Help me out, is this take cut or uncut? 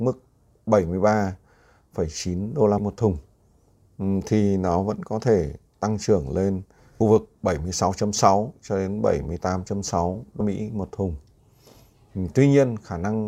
cut